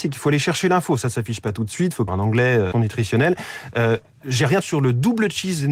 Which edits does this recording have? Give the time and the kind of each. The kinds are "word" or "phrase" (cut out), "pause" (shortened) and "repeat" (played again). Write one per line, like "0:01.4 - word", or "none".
0:02.1 - phrase
0:02.7 - word
0:04.6 - phrase